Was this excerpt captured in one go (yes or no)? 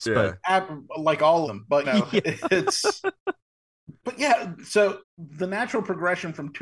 no